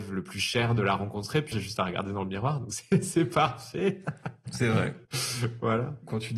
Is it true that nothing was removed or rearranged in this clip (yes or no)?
no